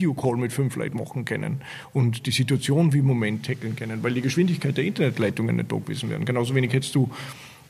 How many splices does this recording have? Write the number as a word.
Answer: zero